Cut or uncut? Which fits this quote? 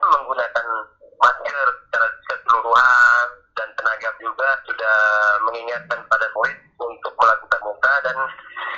cut